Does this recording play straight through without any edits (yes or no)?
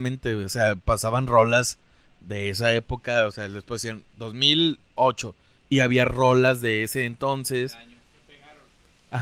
yes